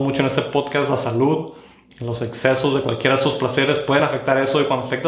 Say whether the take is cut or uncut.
uncut